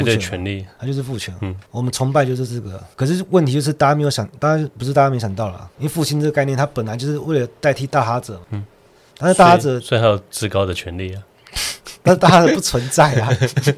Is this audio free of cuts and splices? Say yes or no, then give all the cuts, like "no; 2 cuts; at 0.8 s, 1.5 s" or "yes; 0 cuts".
yes; 0 cuts